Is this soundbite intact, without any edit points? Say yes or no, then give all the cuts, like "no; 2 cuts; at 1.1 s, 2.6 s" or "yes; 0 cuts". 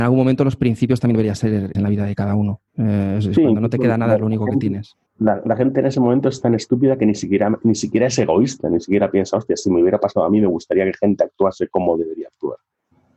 no; 3 cuts; at 1.7 s, 2.7 s, 5.1 s